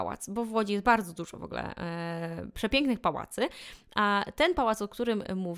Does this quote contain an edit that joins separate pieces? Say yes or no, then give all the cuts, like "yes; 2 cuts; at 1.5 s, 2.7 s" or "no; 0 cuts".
no; 0 cuts